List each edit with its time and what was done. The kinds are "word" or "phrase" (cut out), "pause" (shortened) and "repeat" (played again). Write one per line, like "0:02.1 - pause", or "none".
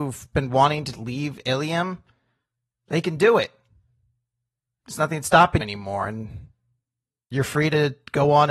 0:00.9 - word
0:05.6 - word